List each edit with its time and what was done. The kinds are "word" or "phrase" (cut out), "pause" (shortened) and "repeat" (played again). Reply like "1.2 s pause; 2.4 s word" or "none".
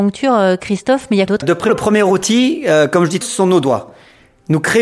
1.3 s word; 1.7 s word; 3.2 s word